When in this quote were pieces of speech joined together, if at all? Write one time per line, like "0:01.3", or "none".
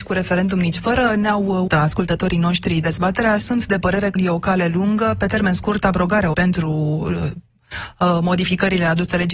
0:01.7
0:03.4
0:04.2
0:06.3